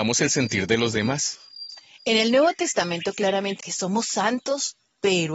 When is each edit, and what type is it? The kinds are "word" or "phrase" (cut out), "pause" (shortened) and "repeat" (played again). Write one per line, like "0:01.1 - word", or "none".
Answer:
0:03.6 - word